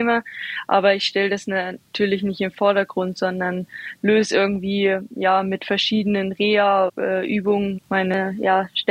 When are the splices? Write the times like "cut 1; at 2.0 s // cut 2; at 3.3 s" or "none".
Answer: cut 1; at 6.9 s // cut 2; at 7.8 s